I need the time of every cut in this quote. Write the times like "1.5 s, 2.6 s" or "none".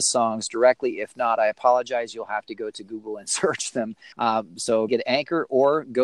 4.1 s, 4.9 s